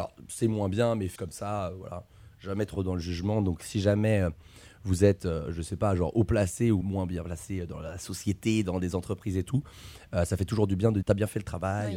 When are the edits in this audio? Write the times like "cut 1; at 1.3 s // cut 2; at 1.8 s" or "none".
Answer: cut 1; at 1.2 s // cut 2; at 6.8 s // cut 3; at 11.0 s